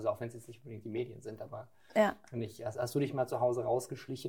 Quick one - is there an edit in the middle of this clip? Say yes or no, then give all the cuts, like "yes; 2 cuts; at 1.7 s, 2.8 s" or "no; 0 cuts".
no; 0 cuts